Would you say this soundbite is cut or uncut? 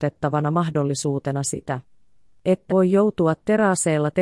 cut